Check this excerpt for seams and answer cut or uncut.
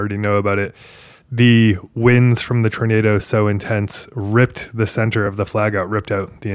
uncut